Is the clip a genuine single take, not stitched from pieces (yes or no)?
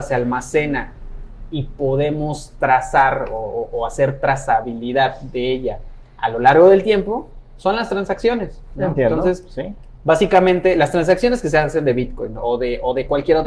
yes